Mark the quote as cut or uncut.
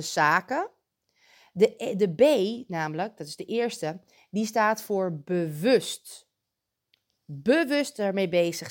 uncut